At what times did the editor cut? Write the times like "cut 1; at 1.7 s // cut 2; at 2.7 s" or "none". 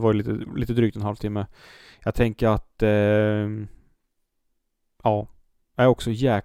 none